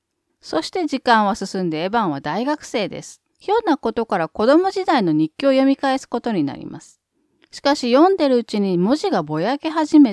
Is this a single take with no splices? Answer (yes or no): no